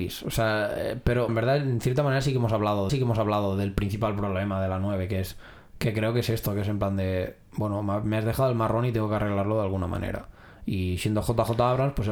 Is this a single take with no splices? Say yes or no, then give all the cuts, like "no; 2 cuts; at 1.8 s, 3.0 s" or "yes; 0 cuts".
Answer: no; 2 cuts; at 1.3 s, 2.9 s